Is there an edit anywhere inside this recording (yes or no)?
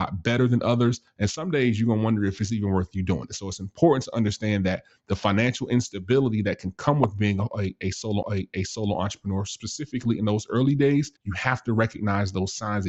yes